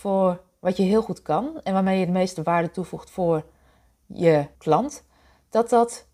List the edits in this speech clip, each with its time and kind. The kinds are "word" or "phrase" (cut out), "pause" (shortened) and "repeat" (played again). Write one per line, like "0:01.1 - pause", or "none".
0:04.5 - pause